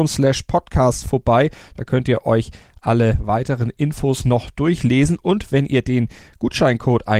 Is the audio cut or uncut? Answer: uncut